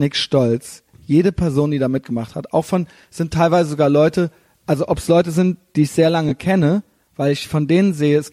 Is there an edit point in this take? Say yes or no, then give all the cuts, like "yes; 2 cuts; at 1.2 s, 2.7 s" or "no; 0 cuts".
no; 0 cuts